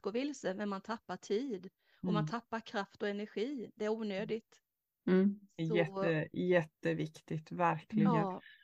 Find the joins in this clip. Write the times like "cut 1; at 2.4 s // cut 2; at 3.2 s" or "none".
none